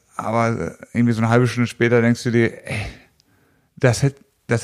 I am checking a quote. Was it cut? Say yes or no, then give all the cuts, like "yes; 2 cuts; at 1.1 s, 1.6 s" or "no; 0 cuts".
no; 0 cuts